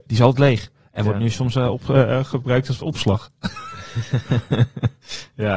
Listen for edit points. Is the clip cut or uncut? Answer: uncut